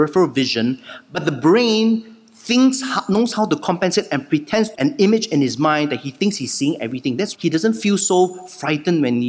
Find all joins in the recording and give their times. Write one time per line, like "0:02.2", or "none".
0:04.7
0:07.3